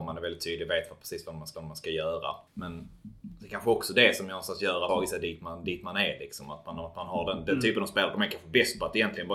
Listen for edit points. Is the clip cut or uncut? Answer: cut